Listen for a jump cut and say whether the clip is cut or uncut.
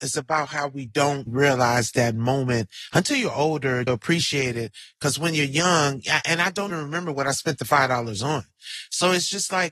cut